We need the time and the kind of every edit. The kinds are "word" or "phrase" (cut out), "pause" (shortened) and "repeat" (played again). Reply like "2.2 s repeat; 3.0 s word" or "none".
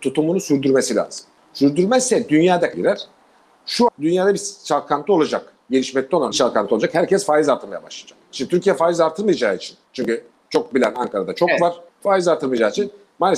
2.7 s word; 3.9 s word; 6.3 s phrase; 8.2 s pause; 9.9 s pause; 11.9 s pause